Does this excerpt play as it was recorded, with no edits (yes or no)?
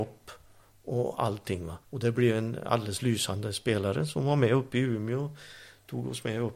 no